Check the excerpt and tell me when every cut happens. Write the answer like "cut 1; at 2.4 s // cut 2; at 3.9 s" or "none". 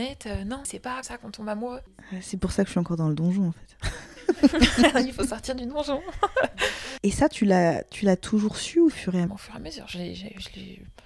cut 1; at 1.0 s // cut 2; at 8.9 s // cut 3; at 9.3 s